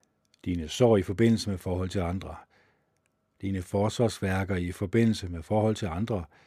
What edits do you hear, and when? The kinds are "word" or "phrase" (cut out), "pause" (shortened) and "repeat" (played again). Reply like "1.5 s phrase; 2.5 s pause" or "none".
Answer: none